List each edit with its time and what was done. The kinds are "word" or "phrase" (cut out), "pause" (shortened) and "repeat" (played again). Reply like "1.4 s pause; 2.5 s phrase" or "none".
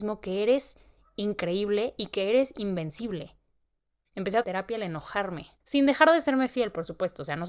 4.4 s phrase; 5.6 s pause